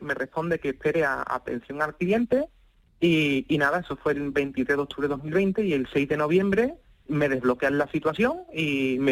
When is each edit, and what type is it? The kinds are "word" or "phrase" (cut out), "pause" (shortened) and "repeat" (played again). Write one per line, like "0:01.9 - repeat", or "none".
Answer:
0:07.1 - word